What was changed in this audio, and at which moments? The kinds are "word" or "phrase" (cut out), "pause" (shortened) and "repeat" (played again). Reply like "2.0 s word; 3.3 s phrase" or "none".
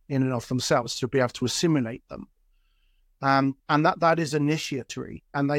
3.6 s pause